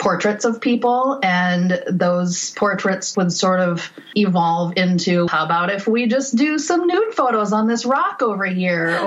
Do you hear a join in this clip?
yes; 2 cuts; at 3.1 s, 5.3 s

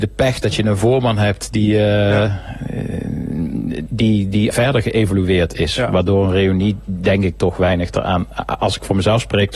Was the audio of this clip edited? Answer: yes; 2 cuts; at 3.9 s, 4.5 s

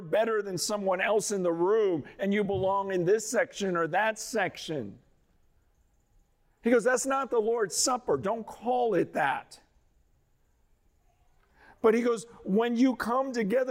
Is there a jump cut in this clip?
no; 0 cuts

